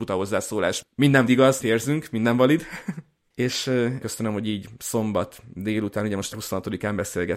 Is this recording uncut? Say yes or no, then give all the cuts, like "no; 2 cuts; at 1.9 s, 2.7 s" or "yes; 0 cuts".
no; 4 cuts; at 1.3 s, 1.6 s, 4.0 s, 6.3 s